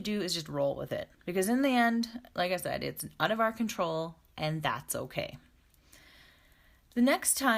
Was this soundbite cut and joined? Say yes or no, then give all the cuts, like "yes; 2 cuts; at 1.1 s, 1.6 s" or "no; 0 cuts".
yes; 1 cut; at 1.1 s